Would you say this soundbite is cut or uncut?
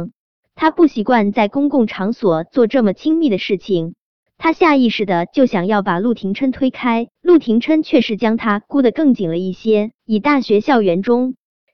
cut